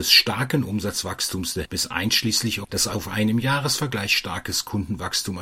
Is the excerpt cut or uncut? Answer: cut